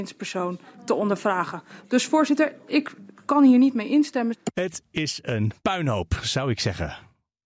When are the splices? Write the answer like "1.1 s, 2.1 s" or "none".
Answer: 5.6 s